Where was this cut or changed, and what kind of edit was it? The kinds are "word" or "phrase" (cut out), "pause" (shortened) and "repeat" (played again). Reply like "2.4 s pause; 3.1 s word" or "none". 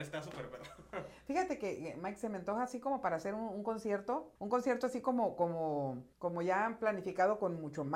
4.4 s pause; 6.1 s pause